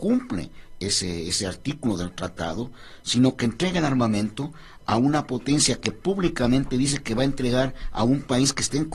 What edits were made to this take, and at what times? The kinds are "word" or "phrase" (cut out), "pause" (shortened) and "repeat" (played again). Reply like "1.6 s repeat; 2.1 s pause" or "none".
none